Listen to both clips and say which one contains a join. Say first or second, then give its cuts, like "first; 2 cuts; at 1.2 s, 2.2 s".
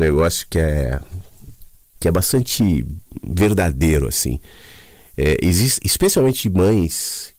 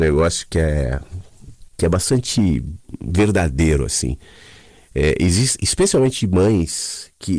second; 1 cut; at 1.7 s